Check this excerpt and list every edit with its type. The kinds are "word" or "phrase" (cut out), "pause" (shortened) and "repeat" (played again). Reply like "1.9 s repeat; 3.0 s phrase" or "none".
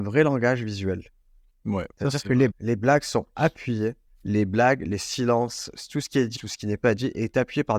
1.9 s pause; 2.5 s word; 4.1 s pause; 6.4 s word

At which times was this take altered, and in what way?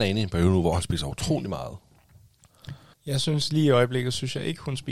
2.9 s pause

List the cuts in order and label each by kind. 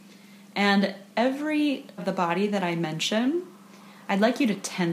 2.0 s word

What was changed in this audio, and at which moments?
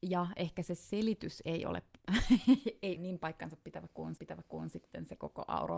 3.0 s word; 4.2 s repeat

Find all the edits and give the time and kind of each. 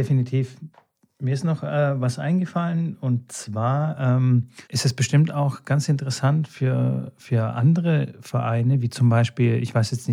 4.6 s pause

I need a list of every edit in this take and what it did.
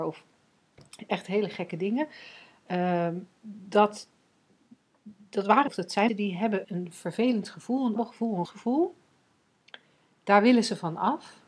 5.7 s word; 6.1 s word; 6.6 s word; 8.0 s word; 8.4 s word

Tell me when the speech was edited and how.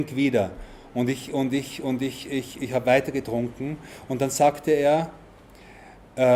none

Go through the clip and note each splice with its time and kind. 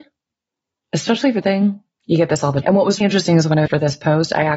1.4 s phrase; 2.6 s word; 3.0 s word; 3.7 s phrase

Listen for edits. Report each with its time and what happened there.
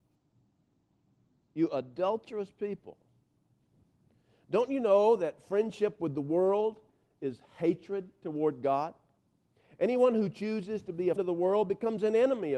11.2 s word

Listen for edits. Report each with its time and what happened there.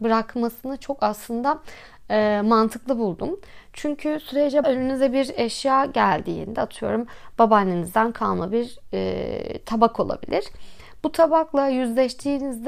4.6 s word

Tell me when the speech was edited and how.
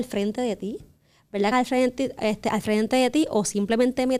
1.5 s word

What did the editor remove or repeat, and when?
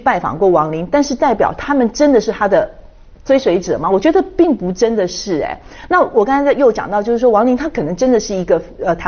none

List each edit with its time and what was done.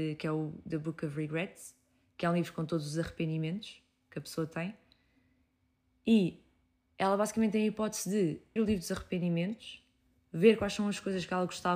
8.6 s word

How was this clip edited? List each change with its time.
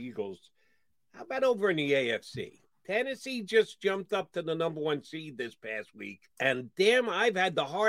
6.3 s pause

